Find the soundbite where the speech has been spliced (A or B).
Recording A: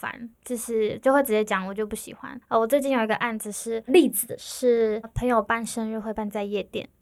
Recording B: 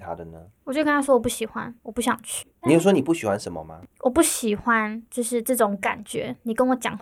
A